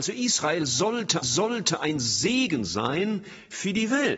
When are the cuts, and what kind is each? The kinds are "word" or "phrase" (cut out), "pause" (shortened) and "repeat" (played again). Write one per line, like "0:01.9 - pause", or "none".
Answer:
0:01.2 - repeat